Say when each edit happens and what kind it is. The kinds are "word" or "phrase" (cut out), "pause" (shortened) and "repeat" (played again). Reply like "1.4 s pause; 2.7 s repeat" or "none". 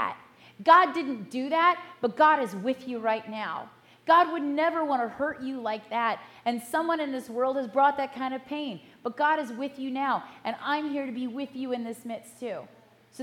none